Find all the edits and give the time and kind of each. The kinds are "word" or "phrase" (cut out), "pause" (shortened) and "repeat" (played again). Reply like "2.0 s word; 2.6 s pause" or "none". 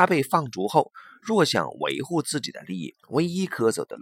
3.0 s pause